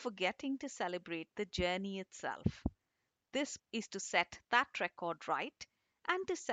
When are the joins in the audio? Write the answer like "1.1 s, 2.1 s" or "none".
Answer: 3.6 s

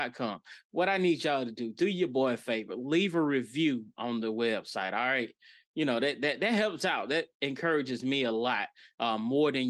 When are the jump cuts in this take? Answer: none

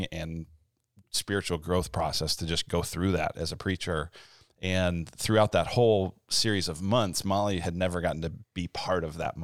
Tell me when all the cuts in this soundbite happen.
none

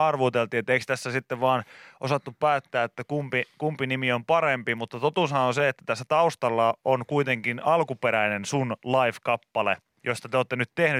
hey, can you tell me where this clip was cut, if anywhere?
none

